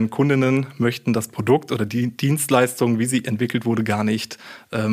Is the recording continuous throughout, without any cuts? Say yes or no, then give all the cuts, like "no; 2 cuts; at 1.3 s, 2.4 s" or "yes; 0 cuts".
yes; 0 cuts